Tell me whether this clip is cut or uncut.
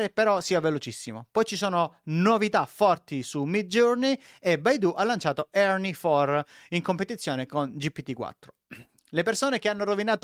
uncut